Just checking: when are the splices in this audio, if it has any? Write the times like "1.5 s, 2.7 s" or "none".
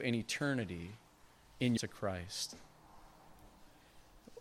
1.8 s